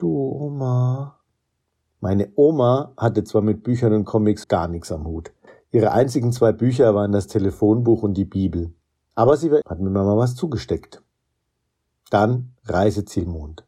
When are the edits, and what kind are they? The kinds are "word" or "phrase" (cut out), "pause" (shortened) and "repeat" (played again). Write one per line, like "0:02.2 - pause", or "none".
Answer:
0:04.4 - word
0:05.5 - pause
0:09.6 - phrase